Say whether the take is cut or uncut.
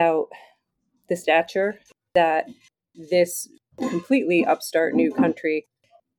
uncut